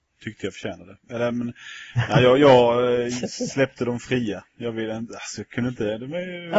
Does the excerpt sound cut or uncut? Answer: uncut